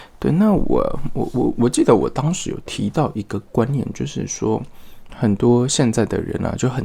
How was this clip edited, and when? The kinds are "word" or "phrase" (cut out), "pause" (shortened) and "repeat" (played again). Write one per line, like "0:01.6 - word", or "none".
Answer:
0:05.1 - word